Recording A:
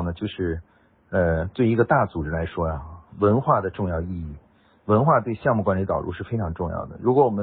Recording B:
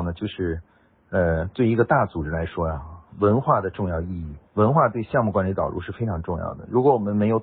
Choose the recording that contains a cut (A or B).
B